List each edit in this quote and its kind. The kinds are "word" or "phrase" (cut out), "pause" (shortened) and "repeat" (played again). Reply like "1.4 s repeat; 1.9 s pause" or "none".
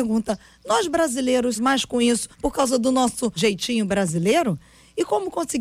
1.6 s word; 2.3 s pause; 3.4 s word